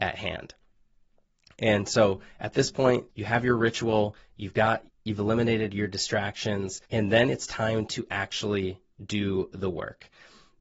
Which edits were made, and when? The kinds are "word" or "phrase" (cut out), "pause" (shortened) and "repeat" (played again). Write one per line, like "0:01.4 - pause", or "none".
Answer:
0:03.1 - pause
0:04.9 - pause
0:06.9 - pause